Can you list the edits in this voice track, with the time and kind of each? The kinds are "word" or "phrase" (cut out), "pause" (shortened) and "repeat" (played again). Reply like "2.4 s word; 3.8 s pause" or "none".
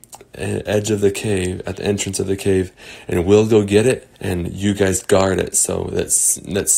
4.1 s pause